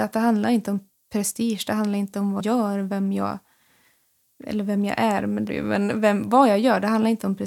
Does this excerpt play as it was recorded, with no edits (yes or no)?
no